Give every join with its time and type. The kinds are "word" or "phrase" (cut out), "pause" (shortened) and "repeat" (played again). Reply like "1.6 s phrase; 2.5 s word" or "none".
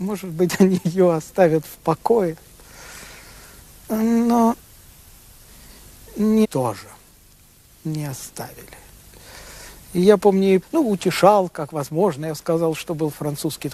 6.4 s word; 10.6 s word